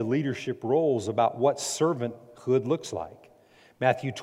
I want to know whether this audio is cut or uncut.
uncut